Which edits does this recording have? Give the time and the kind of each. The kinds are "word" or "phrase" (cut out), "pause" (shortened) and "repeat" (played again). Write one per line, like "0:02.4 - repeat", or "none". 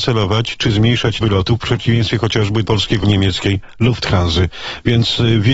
0:01.2 - word
0:02.7 - word
0:03.0 - phrase